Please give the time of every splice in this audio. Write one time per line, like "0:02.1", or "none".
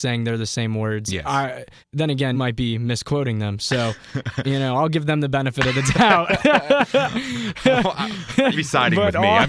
0:01.8
0:02.3
0:08.5